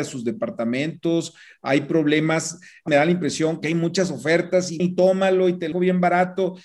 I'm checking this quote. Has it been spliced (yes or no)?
yes